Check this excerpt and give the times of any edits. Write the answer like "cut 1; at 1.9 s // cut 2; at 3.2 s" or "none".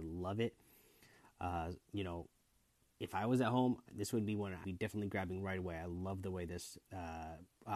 cut 1; at 1.8 s // cut 2; at 4.6 s // cut 3; at 6.8 s

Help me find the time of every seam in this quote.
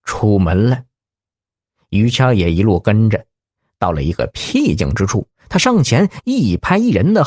none

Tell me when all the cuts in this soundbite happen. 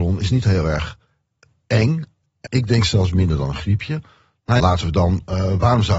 cut 1; at 2.4 s // cut 2; at 4.6 s

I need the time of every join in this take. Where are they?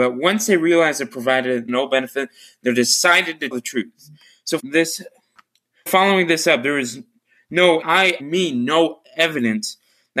cut 1; at 1.7 s // cut 2; at 3.5 s // cut 3; at 4.6 s // cut 4; at 5.9 s // cut 5; at 7.8 s // cut 6; at 8.2 s

